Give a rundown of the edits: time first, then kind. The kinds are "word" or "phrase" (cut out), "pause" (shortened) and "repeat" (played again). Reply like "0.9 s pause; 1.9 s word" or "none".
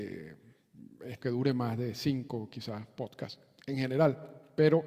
1.2 s phrase